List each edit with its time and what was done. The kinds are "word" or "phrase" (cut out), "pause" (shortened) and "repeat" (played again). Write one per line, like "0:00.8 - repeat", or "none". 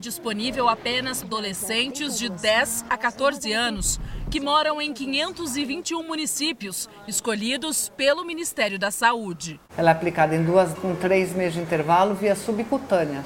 0:01.2 - word
0:09.7 - pause
0:10.8 - word